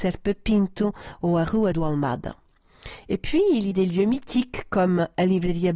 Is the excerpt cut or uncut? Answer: cut